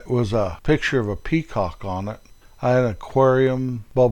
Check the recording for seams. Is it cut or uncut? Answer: uncut